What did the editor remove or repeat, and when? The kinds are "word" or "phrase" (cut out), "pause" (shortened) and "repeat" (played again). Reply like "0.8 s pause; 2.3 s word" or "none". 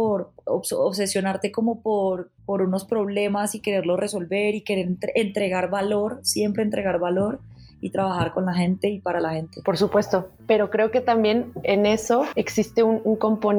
2.4 s pause